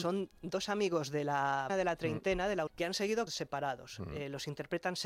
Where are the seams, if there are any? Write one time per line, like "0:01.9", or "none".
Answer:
0:01.7
0:02.7
0:03.3

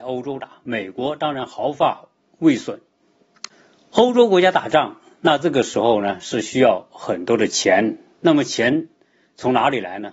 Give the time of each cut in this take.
none

